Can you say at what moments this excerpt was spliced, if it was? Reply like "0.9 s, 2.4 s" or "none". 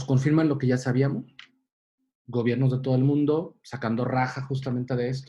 none